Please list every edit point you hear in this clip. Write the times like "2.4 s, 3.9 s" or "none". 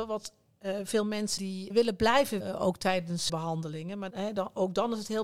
1.4 s, 1.7 s, 2.4 s, 3.3 s, 4.1 s